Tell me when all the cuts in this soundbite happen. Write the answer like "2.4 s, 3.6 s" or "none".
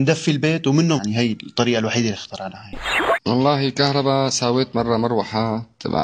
1.0 s